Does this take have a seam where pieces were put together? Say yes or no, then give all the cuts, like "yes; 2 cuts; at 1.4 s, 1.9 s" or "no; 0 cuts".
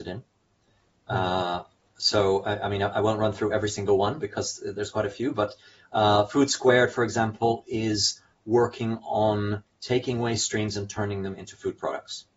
no; 0 cuts